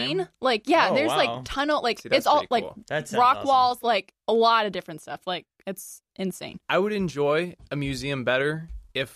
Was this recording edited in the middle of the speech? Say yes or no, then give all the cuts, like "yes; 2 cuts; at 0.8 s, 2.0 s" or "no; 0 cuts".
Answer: yes; 1 cut; at 4.2 s